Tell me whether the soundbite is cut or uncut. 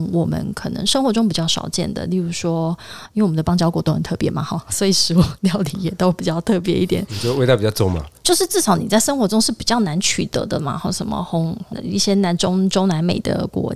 uncut